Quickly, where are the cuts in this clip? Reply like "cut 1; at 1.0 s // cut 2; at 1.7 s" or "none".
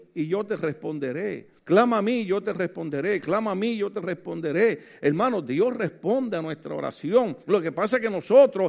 cut 1; at 1.6 s // cut 2; at 7.4 s